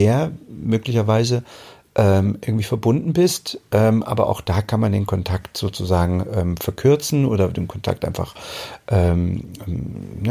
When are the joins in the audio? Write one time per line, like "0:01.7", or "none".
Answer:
none